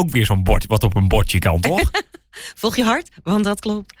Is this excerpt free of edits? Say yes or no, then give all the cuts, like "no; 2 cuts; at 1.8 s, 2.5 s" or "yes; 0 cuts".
yes; 0 cuts